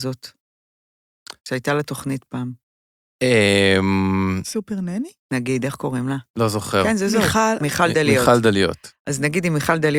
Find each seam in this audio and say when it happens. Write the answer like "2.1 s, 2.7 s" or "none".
1.4 s, 6.3 s